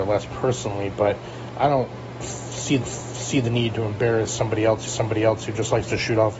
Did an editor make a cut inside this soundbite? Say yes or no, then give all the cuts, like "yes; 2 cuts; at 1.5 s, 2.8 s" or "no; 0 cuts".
yes; 2 cuts; at 2.8 s, 4.9 s